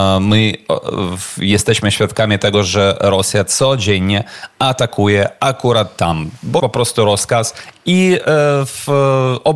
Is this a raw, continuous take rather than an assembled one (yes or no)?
no